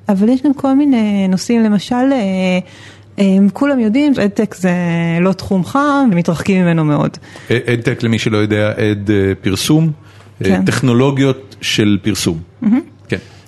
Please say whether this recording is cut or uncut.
cut